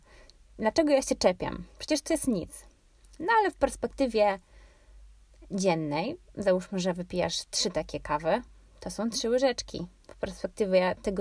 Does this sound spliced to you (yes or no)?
no